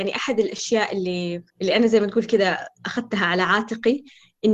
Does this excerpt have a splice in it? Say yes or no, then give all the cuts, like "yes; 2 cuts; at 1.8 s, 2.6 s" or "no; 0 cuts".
yes; 1 cut; at 1.5 s